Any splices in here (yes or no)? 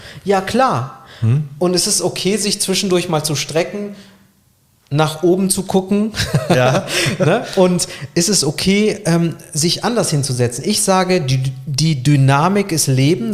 no